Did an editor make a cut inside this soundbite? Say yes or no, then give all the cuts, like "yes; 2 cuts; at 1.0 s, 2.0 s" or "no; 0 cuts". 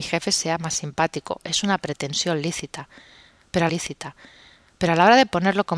yes; 1 cut; at 3.7 s